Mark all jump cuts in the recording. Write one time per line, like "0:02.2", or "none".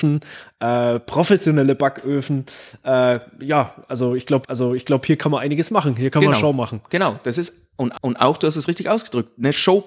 0:04.4
0:07.9